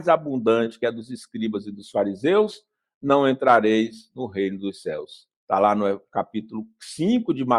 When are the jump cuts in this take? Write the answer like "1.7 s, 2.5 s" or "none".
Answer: none